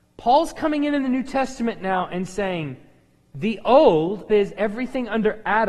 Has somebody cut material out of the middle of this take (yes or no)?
yes